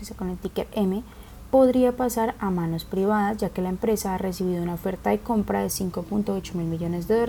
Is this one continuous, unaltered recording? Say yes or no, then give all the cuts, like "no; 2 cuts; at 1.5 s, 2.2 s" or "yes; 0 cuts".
yes; 0 cuts